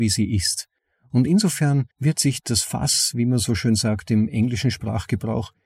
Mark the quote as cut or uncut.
cut